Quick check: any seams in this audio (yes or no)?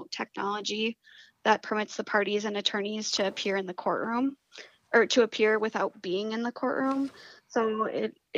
no